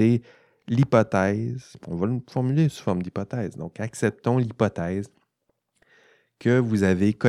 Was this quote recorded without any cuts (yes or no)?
yes